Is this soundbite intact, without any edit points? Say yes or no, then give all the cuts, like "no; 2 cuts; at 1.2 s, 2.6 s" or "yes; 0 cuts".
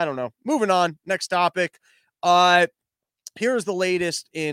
yes; 0 cuts